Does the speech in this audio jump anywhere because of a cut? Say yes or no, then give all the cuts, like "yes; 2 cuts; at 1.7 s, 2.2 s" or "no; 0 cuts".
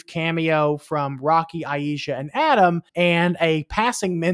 yes; 1 cut; at 2.9 s